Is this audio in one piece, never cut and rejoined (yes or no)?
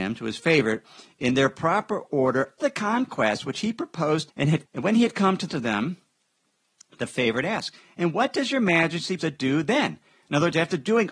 no